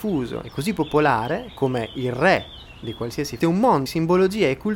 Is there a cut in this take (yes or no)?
yes